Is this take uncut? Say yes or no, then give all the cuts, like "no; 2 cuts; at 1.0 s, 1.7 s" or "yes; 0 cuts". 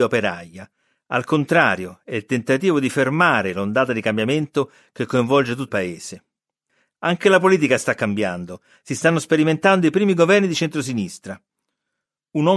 no; 1 cut; at 5.7 s